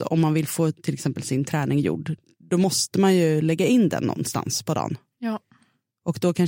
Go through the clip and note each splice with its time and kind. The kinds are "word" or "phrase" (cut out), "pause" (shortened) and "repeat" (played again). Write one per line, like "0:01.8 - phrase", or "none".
none